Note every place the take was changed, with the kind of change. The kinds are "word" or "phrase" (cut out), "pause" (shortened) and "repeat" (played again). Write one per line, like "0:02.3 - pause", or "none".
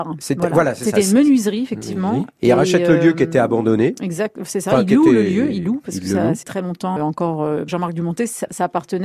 0:06.4 - word
0:07.0 - word
0:07.7 - word